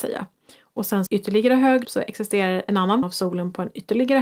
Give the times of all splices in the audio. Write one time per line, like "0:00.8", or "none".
0:01.1
0:01.8
0:02.7
0:03.0

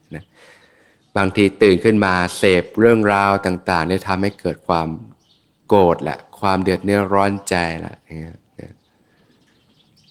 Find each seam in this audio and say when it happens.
none

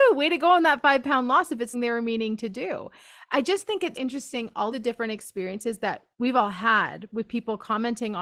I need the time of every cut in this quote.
0:01.7
0:03.9
0:04.7

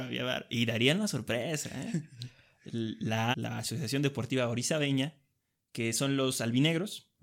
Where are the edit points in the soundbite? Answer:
0:03.3

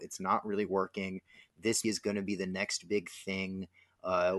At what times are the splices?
0:01.8

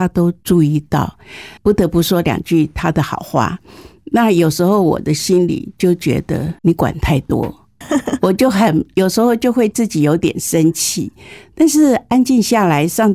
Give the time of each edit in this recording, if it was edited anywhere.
0:01.6
0:06.6
0:07.8

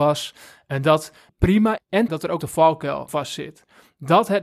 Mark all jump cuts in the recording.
0:01.3
0:01.8
0:02.1
0:02.4
0:03.1

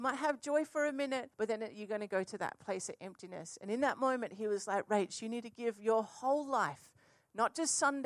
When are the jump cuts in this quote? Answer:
0:01.3

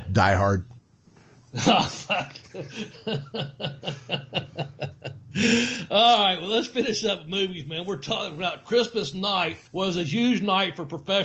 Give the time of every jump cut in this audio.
0:09.7

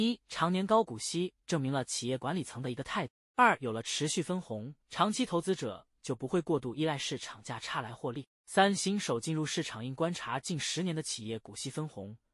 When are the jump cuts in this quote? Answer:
0:03.2
0:04.8
0:08.3

